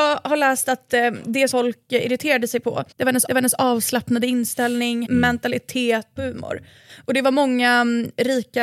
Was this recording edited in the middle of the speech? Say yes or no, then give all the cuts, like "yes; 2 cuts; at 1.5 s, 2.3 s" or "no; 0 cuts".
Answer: yes; 5 cuts; at 1.5 s, 2.9 s, 3.3 s, 5.0 s, 6.2 s